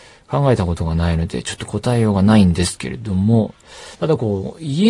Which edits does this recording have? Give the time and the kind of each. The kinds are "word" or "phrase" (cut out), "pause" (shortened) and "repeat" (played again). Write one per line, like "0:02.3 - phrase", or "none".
0:03.9 - pause

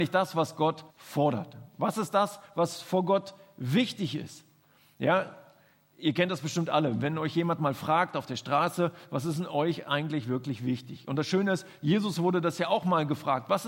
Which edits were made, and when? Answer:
0:00.9 - pause

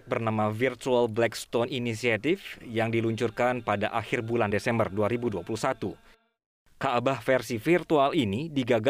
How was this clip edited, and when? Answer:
none

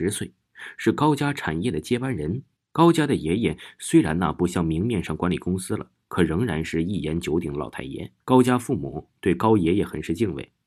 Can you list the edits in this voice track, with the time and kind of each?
0:02.6 - pause
0:08.2 - pause

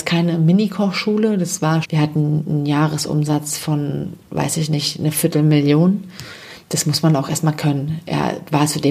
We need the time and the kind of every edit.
0:01.8 - word

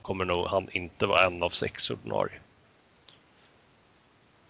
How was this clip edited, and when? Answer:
none

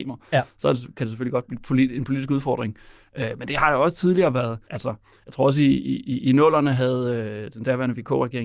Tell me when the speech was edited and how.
0:04.6 - pause

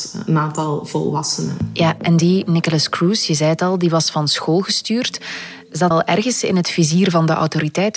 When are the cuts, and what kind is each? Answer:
0:05.9 - word

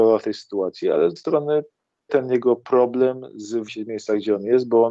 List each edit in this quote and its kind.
0:01.2 - word
0:02.1 - word
0:03.7 - word

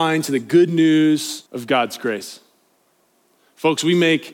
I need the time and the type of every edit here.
0:01.5 - pause

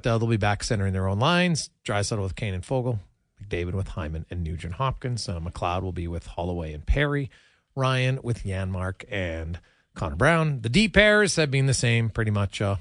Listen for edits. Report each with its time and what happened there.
none

